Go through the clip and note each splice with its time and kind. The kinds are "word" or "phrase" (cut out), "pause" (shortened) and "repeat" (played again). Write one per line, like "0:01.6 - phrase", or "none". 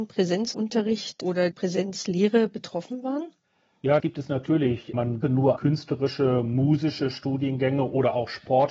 0:01.5 - word
0:04.0 - word
0:05.2 - word
0:05.6 - word